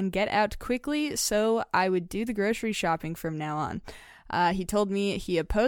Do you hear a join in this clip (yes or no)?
no